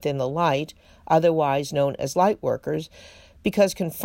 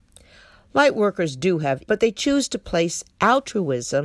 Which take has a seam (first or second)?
second